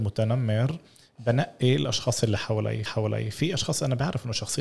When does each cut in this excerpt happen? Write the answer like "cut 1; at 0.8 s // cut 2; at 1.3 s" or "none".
cut 1; at 2.9 s